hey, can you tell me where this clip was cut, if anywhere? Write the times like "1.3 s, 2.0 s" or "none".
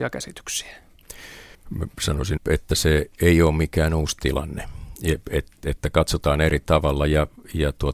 1.5 s, 2.4 s